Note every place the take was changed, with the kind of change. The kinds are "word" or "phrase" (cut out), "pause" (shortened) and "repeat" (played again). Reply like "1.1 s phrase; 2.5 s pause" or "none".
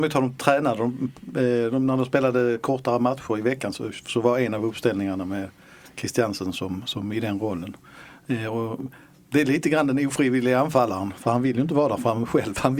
none